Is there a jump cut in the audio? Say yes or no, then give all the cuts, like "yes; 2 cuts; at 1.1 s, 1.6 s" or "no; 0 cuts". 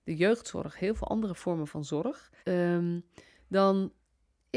yes; 1 cut; at 2.4 s